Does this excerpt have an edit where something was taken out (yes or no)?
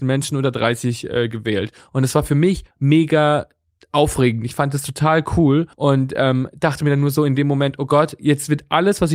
yes